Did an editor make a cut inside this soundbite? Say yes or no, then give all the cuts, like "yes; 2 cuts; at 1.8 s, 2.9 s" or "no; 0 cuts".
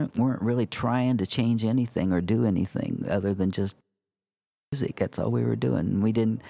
no; 0 cuts